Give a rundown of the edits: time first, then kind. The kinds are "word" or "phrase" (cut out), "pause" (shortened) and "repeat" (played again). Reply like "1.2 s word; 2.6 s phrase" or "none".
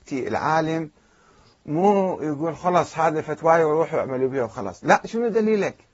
none